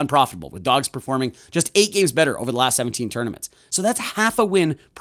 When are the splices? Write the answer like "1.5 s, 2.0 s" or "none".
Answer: none